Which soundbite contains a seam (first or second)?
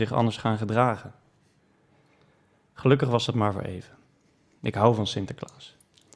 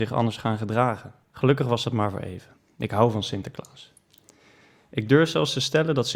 second